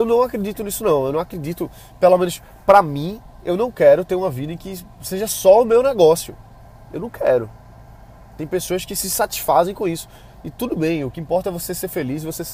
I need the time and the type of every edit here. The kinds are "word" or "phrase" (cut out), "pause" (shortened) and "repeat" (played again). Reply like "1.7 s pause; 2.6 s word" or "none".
none